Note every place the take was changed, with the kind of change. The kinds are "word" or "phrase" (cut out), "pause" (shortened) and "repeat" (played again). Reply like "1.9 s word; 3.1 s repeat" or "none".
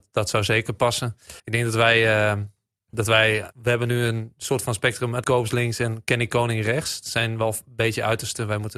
1.4 s pause; 2.9 s word; 3.5 s pause; 5.2 s word